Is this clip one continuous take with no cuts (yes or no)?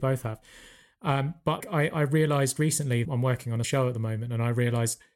no